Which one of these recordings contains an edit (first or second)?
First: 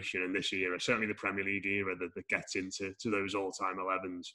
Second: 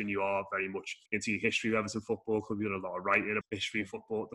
second